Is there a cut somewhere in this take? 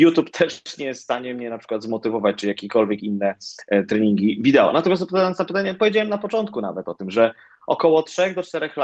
no; 0 cuts

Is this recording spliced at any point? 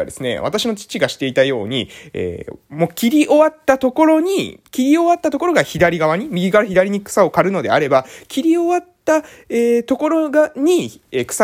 no; 0 cuts

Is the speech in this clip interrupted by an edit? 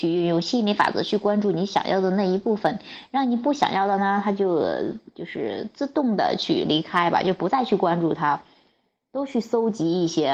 no; 0 cuts

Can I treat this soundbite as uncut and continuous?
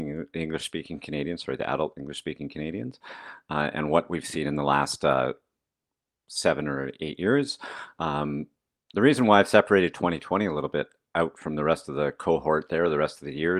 yes; 0 cuts

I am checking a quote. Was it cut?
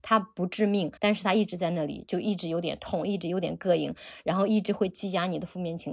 yes; 1 cut; at 1.0 s

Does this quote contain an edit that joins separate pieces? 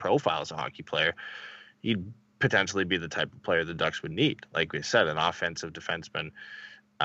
no; 0 cuts

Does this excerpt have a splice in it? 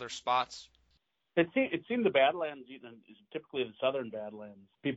no; 0 cuts

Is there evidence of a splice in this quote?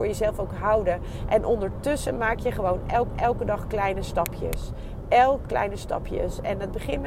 yes; 2 cuts; at 3.1 s, 5.4 s

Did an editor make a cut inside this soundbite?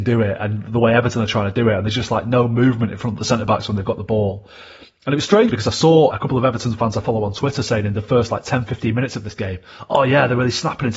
yes; 2 cuts; at 5.5 s, 6.1 s

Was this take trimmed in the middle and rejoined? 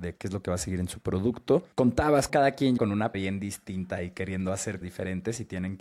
yes; 4 cuts; at 2.3 s, 2.8 s, 3.1 s, 4.8 s

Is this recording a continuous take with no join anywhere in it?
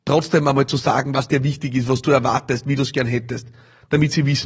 yes; 0 cuts

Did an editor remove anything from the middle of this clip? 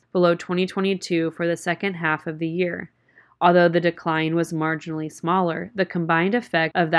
no; 0 cuts

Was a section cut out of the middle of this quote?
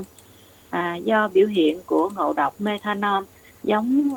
no; 0 cuts

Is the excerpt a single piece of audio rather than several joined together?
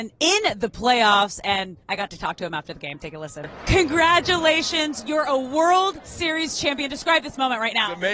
no; 1 cut; at 1.8 s

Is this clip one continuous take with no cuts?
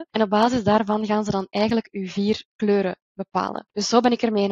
yes; 0 cuts

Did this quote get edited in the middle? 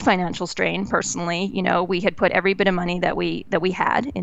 no; 0 cuts

